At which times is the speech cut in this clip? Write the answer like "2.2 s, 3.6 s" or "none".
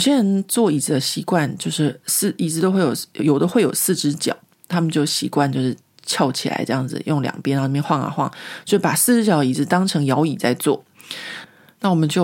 none